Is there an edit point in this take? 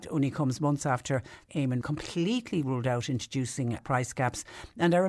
yes; 3 cuts; at 1.5 s, 1.8 s, 3.8 s

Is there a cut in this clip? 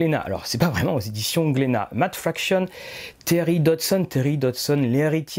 no; 0 cuts

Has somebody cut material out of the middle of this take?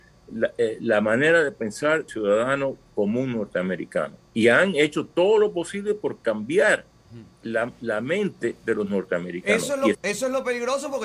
yes; 3 cuts; at 2.1 s, 7.3 s, 9.9 s

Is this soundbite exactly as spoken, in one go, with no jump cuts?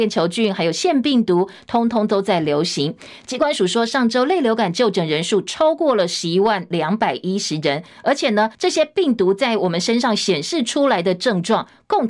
no; 1 cut; at 8.5 s

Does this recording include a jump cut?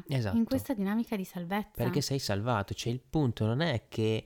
no; 0 cuts

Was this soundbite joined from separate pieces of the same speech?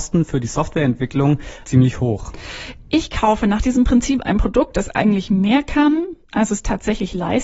yes; 3 cuts; at 1.6 s, 4.2 s, 6.2 s

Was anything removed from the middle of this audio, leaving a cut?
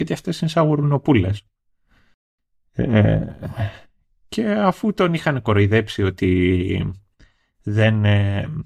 no; 0 cuts

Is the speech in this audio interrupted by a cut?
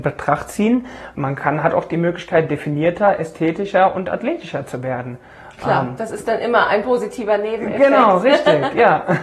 no; 0 cuts

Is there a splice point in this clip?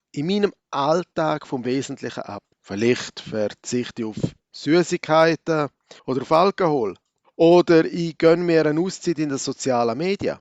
yes; 3 cuts; at 2.5 s, 6.0 s, 7.2 s

